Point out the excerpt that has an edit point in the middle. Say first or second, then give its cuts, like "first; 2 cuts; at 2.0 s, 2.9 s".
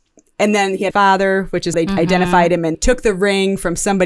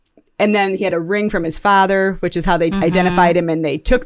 first; 3 cuts; at 0.9 s, 1.7 s, 2.7 s